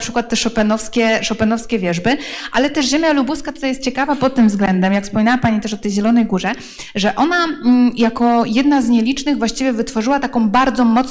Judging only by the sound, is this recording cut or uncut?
uncut